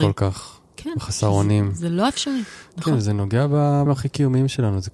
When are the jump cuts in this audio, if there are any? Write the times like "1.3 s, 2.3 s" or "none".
3.9 s